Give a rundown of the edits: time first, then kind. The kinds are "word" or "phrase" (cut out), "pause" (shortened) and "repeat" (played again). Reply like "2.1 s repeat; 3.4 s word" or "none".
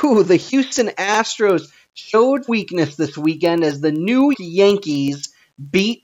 2.5 s word; 4.3 s word